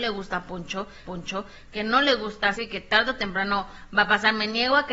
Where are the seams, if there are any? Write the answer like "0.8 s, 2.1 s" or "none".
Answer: 1.1 s, 2.5 s